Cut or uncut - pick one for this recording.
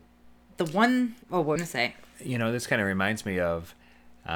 cut